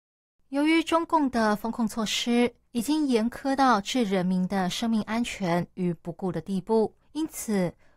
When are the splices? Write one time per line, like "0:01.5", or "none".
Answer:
0:02.6
0:07.0